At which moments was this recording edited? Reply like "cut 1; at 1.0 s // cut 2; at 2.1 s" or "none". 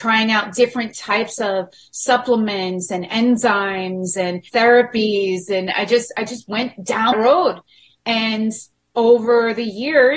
cut 1; at 4.5 s // cut 2; at 7.1 s

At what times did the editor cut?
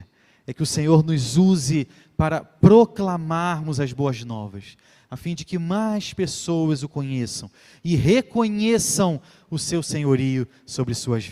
none

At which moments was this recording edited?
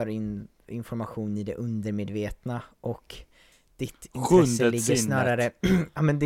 none

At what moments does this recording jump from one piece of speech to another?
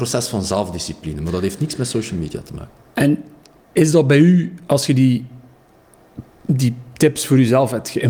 none

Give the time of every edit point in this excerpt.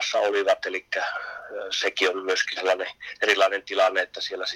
none

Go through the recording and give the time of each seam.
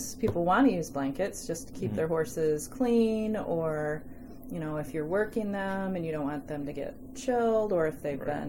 none

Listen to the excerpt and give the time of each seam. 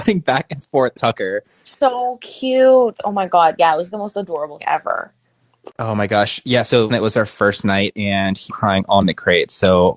cut 1; at 0.9 s // cut 2; at 3.9 s // cut 3; at 4.6 s // cut 4; at 5.7 s // cut 5; at 6.9 s // cut 6; at 8.5 s // cut 7; at 9.0 s

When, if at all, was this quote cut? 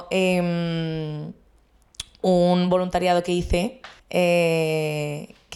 cut 1; at 4.0 s

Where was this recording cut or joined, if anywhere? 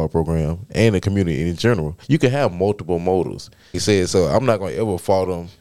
cut 1; at 2.0 s // cut 2; at 3.7 s

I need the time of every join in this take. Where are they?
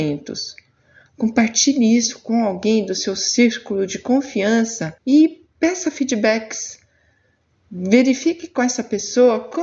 cut 1; at 5.0 s

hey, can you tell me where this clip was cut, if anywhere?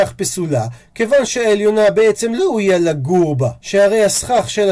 cut 1; at 2.4 s // cut 2; at 3.6 s

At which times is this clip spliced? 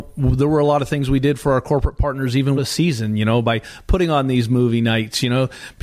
cut 1; at 2.6 s

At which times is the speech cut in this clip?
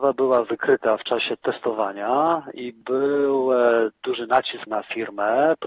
cut 1; at 4.7 s

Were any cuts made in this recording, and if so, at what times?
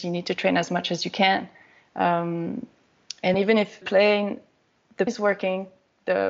cut 1; at 3.3 s // cut 2; at 3.8 s // cut 3; at 5.1 s

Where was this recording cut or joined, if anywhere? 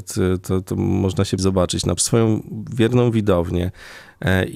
cut 1; at 1.4 s // cut 2; at 2.0 s

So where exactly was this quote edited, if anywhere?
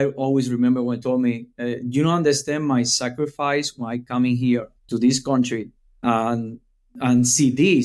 cut 1; at 1.0 s // cut 2; at 4.8 s // cut 3; at 5.8 s

